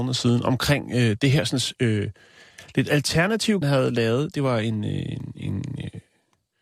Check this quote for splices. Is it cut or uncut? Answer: cut